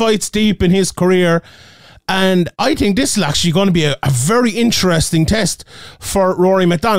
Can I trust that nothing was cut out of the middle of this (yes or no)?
no